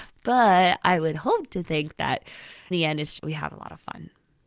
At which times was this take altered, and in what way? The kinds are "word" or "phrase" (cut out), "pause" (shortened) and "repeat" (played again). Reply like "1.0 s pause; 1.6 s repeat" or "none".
2.7 s word; 3.2 s word